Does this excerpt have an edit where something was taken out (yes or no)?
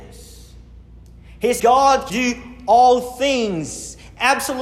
yes